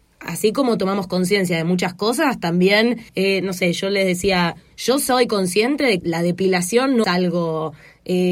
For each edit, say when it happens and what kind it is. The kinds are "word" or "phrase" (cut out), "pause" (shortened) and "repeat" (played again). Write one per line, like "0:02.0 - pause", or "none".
0:03.1 - pause
0:06.0 - word
0:07.0 - word